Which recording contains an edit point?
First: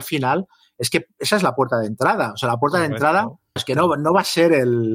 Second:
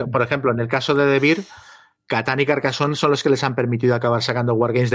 first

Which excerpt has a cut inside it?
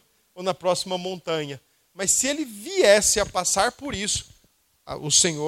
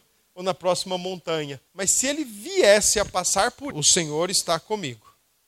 second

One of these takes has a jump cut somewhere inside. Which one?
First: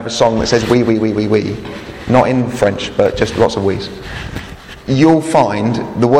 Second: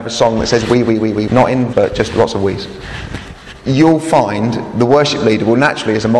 second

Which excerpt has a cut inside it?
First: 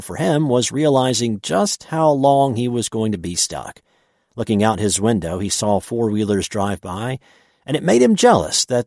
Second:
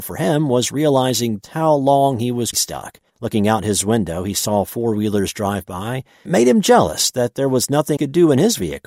second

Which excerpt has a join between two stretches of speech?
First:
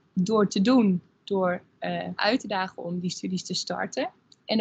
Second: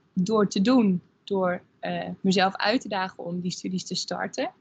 first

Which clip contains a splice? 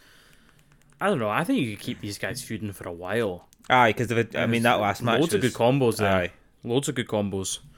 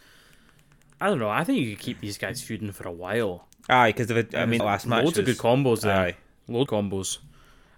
second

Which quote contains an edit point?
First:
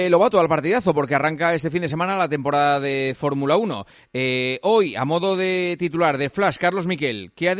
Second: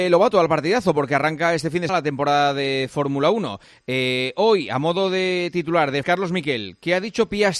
second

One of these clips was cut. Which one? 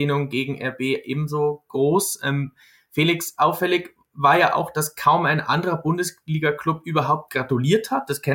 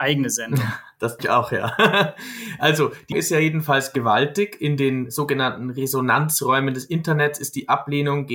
second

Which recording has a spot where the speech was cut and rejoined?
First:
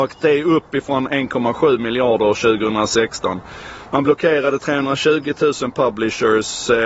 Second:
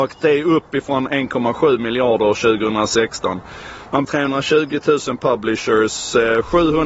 second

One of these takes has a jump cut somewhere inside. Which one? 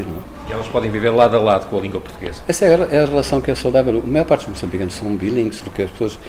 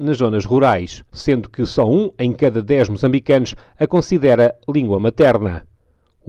second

